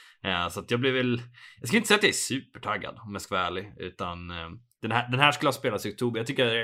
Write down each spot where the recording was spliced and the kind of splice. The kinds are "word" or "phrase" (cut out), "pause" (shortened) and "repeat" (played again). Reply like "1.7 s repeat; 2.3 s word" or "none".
none